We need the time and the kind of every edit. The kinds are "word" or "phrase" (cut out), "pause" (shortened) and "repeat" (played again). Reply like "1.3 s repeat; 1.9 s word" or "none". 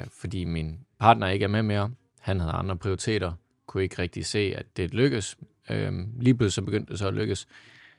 4.7 s word